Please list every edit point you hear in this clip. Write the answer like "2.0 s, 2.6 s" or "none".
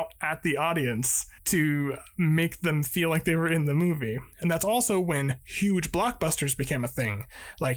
1.4 s, 4.3 s